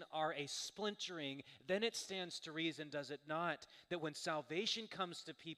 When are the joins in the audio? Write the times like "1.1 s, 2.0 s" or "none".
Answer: none